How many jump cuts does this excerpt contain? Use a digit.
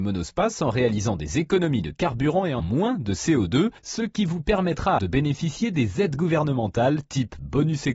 3